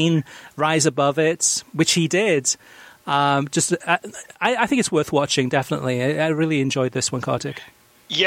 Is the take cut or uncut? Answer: uncut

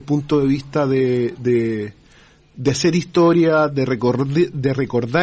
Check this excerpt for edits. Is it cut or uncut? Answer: uncut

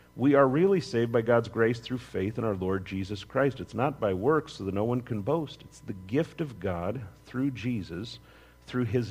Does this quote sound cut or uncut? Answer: uncut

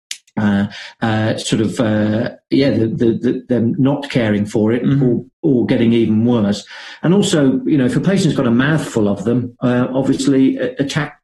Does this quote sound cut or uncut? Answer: cut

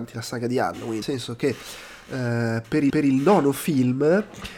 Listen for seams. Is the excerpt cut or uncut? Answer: cut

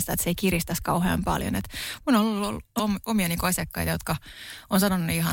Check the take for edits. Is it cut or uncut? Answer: cut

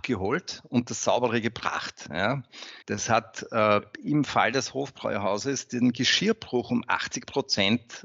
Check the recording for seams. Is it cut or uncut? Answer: cut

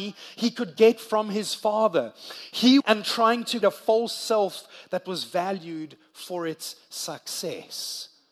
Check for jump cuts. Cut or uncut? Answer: cut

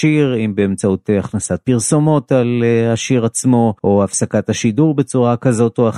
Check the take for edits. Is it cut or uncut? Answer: cut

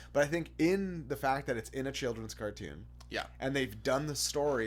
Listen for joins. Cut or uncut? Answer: uncut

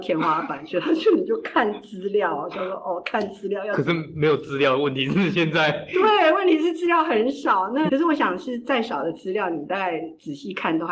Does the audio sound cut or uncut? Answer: cut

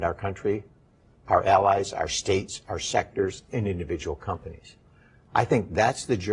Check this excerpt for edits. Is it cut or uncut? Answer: uncut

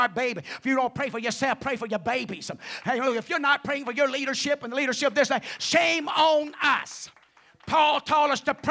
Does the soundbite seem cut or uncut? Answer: uncut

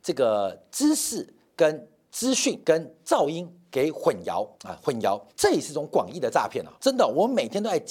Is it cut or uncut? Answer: cut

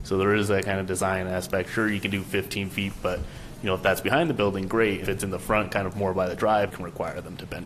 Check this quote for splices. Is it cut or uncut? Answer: cut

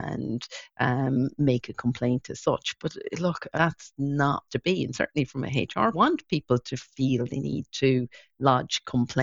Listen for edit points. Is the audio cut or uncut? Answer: cut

